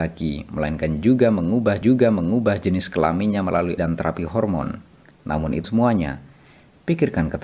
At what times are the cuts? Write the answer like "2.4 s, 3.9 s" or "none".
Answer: 1.8 s, 3.8 s, 5.0 s, 5.6 s